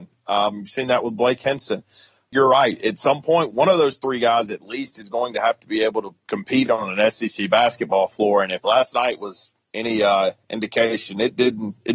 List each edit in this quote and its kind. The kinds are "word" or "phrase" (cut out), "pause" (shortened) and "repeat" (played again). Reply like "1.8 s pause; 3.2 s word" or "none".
none